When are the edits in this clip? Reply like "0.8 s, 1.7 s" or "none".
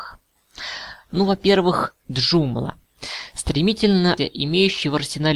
4.2 s